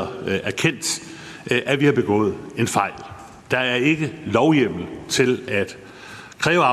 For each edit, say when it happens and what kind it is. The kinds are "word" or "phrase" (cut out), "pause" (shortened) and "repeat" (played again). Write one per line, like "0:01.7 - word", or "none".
0:03.4 - pause